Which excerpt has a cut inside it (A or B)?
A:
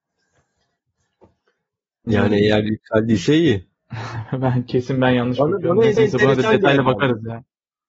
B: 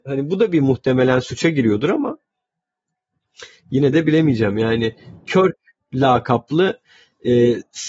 A